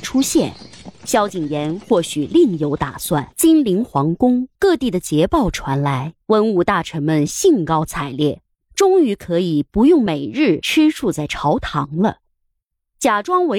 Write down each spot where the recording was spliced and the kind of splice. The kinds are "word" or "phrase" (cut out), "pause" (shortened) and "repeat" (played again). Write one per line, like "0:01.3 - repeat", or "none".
0:03.3 - pause
0:04.5 - pause
0:06.2 - pause